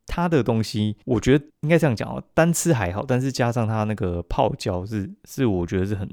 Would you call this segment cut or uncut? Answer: cut